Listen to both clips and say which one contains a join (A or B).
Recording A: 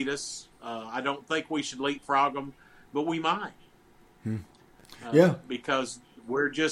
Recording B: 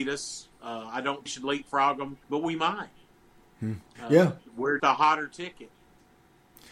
B